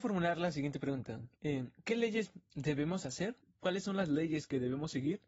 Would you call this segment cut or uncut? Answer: cut